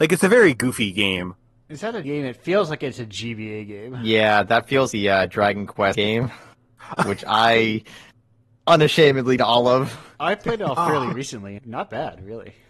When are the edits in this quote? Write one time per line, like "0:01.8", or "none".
0:02.0
0:04.9
0:05.9
0:09.4
0:11.6

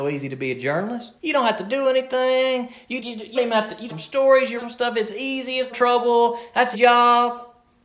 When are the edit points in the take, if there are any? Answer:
0:01.2
0:03.0
0:03.4
0:03.9
0:04.6
0:05.7
0:06.7

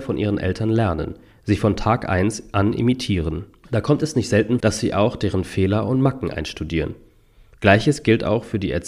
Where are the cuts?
0:04.6

